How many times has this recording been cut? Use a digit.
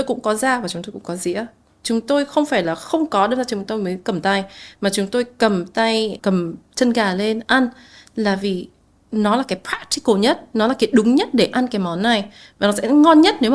1